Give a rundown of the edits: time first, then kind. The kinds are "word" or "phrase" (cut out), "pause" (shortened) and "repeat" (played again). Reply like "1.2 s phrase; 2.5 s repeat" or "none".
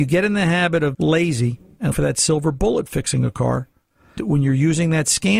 0.9 s word; 1.9 s word; 4.2 s word